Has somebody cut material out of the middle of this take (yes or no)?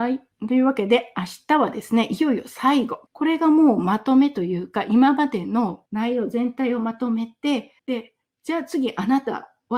yes